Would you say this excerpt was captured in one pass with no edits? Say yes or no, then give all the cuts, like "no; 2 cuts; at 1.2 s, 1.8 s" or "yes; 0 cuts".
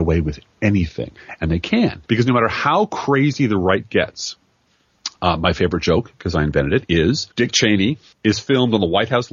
no; 2 cuts; at 2.1 s, 7.3 s